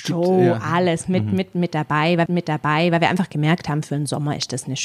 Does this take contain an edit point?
yes; 1 cut; at 2.3 s

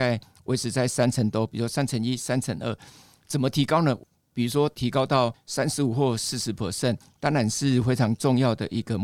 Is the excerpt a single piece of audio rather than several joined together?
yes; 0 cuts

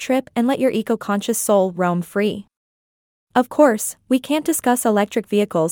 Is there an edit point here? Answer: no; 0 cuts

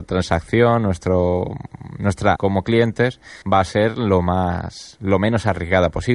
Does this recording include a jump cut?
yes; 2 cuts; at 2.4 s, 3.4 s

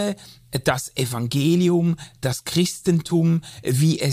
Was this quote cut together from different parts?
no; 0 cuts

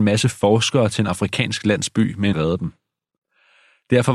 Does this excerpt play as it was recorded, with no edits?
no; 1 cut; at 2.3 s

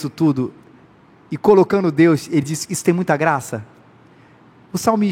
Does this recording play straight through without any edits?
yes; 0 cuts

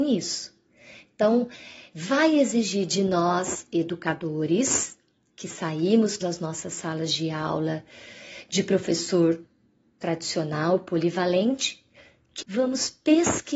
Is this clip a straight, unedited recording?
no; 2 cuts; at 6.2 s, 12.4 s

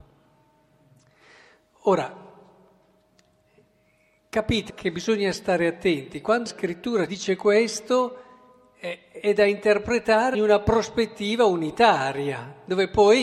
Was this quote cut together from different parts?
yes; 4 cuts; at 4.7 s, 6.5 s, 7.1 s, 10.3 s

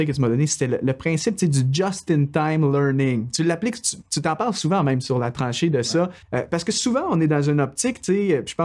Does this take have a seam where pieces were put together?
yes; 1 cut; at 6.2 s

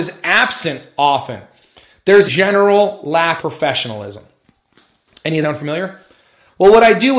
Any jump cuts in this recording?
yes; 3 cuts; at 2.3 s, 3.4 s, 5.4 s

